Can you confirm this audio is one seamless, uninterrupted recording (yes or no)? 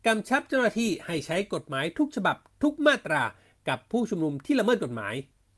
yes